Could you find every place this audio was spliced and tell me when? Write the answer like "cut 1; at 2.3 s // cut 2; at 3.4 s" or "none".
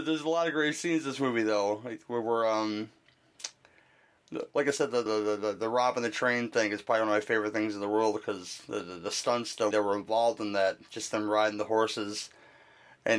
cut 1; at 5.1 s // cut 2; at 9.7 s